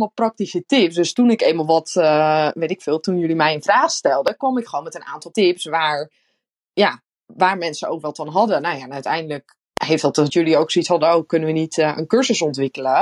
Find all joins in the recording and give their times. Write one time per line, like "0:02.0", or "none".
0:05.3
0:07.1
0:10.3